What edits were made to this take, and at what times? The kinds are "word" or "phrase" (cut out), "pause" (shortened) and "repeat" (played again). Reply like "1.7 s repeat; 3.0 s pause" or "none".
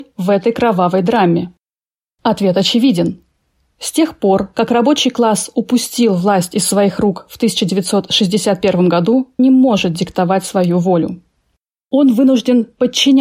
9.4 s word